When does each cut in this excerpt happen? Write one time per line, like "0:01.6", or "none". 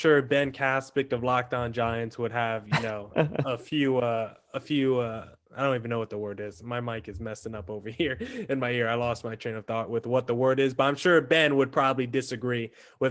none